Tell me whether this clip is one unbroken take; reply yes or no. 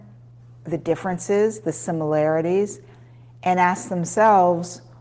yes